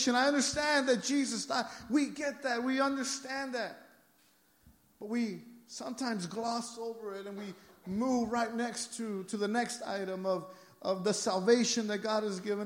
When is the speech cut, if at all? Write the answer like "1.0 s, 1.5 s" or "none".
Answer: none